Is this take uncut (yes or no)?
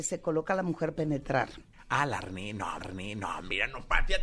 no